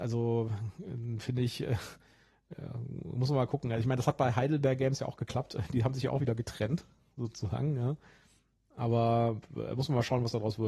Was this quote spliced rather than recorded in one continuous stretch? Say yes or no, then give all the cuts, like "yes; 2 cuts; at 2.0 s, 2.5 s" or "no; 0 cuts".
no; 0 cuts